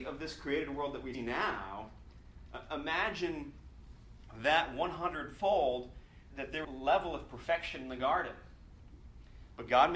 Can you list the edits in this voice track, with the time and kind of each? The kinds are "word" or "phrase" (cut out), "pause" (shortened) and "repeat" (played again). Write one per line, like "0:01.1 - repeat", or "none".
0:01.1 - word
0:06.3 - word
0:06.6 - phrase